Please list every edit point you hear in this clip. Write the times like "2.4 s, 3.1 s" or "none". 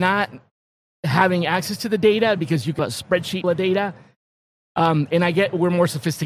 2.8 s, 3.4 s